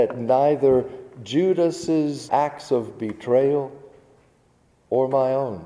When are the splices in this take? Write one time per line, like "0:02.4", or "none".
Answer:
0:02.3